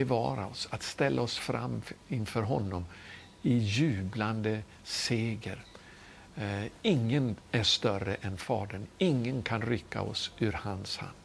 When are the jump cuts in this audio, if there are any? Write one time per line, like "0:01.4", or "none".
none

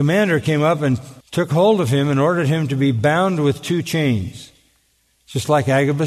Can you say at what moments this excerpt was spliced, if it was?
0:01.2

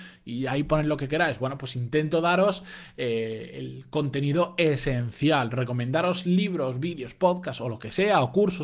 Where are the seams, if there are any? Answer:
none

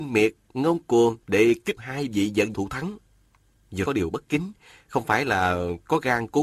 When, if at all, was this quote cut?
0:01.2
0:01.8
0:02.5
0:03.9

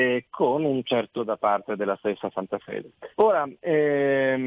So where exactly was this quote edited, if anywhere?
0:01.2
0:03.1

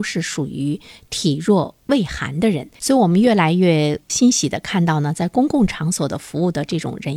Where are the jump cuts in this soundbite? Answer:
0:02.7

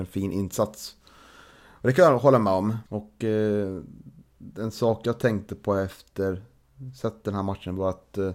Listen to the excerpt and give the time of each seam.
0:02.9

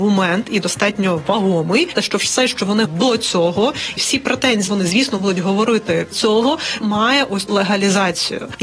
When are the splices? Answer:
0:01.9
0:02.8
0:04.0
0:04.7
0:06.1
0:06.8
0:07.5

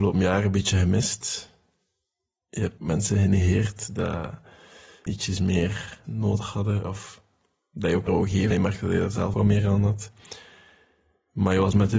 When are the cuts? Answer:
0:02.8
0:05.1
0:06.0
0:08.1
0:08.5
0:09.3

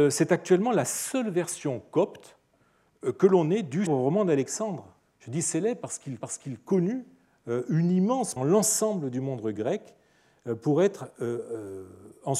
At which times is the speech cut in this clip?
0:03.9
0:05.0
0:06.2
0:08.4

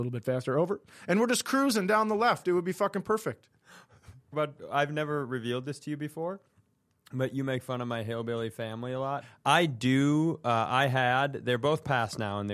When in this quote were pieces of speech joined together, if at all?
0:04.3

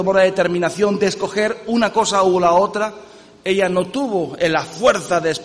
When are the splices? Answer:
none

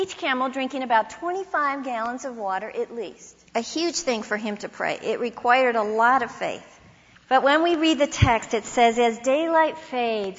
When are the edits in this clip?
0:03.5
0:07.1

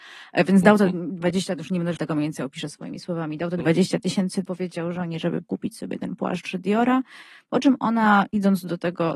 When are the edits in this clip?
0:02.0
0:04.5
0:05.4

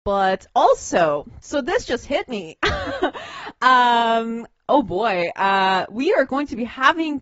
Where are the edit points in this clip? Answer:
none

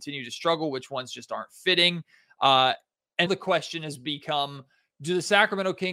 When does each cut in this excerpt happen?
0:03.3

